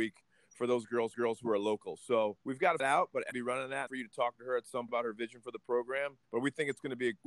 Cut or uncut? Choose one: cut